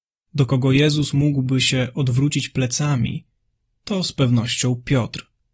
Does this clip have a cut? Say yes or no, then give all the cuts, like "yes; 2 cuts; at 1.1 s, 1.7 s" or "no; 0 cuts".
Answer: no; 0 cuts